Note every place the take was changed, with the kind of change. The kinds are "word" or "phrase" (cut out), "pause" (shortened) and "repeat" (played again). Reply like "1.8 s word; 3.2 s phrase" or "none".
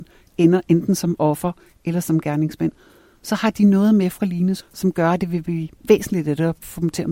4.6 s word